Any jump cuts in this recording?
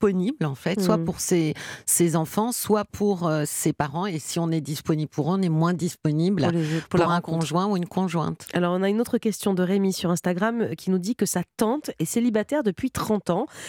no; 0 cuts

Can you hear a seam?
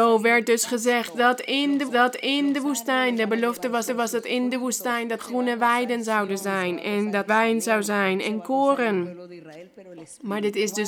yes; 4 cuts; at 1.9 s, 3.9 s, 5.2 s, 7.3 s

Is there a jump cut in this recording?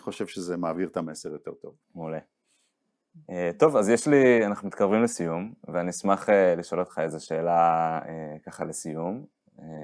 yes; 1 cut; at 1.8 s

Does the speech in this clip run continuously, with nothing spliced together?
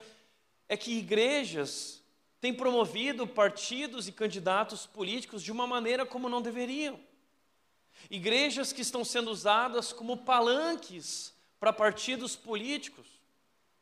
yes; 0 cuts

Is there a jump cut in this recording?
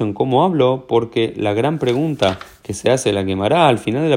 no; 0 cuts

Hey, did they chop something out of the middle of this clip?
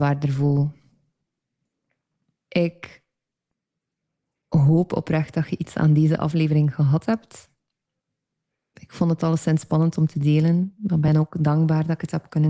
no; 0 cuts

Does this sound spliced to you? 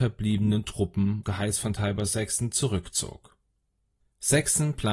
yes; 1 cut; at 1.2 s

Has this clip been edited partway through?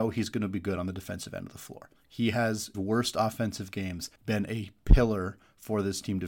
yes; 3 cuts; at 2.0 s, 2.7 s, 4.2 s

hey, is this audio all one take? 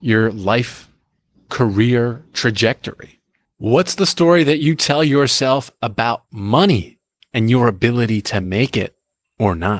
yes; 0 cuts

